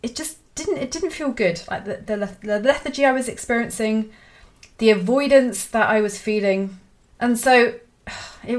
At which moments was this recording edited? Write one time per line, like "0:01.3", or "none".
0:07.1